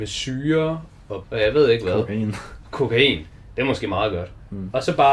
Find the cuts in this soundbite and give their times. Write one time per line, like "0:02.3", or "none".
0:01.2